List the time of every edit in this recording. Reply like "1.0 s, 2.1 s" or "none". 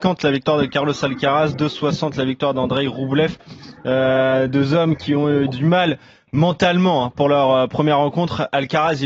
none